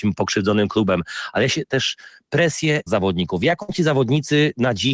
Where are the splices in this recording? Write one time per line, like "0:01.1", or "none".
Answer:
0:01.7
0:02.9